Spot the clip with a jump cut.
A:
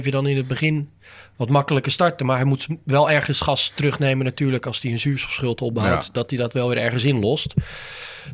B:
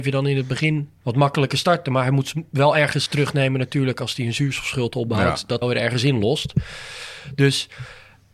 B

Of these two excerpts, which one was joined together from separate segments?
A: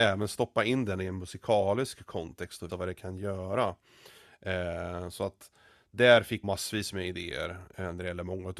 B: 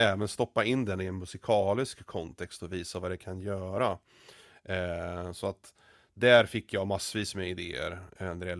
A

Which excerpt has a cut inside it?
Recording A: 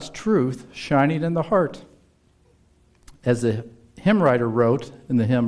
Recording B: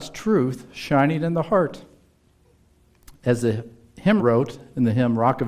B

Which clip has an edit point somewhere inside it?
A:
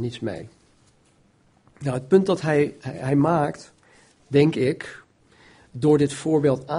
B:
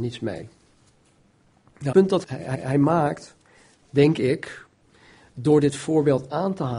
B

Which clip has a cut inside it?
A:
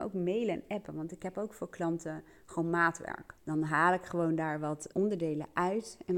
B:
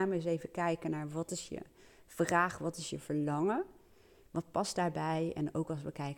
A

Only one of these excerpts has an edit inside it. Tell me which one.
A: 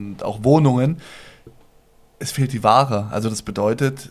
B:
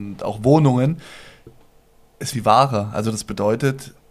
B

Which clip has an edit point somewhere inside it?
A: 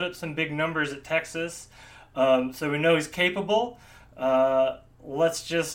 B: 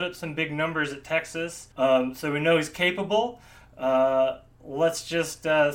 B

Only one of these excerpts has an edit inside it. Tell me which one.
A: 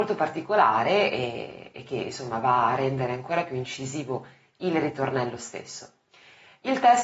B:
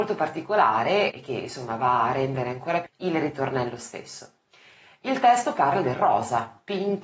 B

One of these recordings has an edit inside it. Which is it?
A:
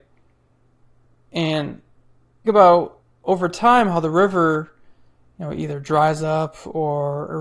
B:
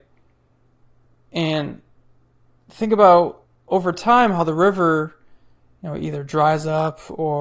A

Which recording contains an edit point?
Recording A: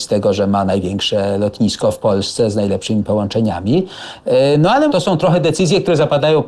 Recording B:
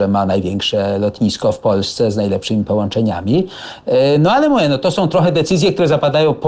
A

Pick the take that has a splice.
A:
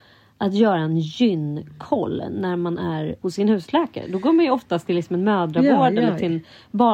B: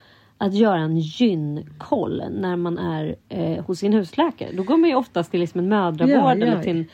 A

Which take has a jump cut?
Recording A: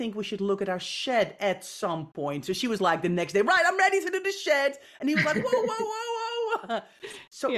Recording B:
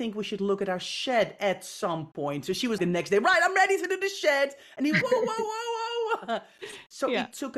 B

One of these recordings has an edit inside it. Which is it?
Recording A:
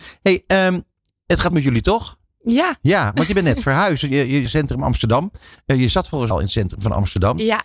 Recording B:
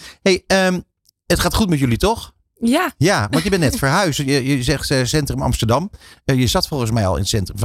A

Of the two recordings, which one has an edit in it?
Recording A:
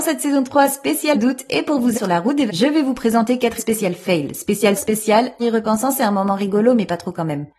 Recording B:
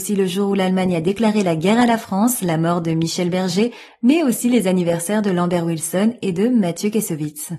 A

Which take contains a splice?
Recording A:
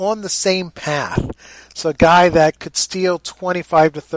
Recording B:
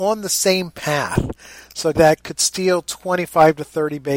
B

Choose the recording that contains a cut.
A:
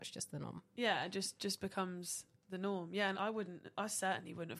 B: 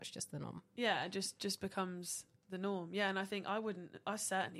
A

